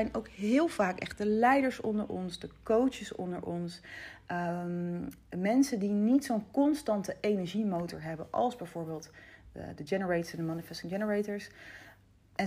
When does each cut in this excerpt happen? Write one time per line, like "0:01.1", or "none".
none